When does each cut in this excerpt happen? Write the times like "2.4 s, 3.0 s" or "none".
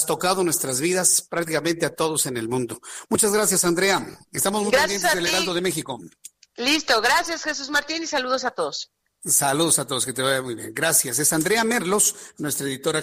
none